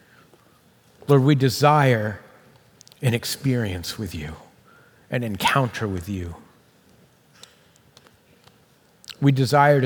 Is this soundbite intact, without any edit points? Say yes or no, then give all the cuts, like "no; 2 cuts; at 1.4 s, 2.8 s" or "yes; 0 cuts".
yes; 0 cuts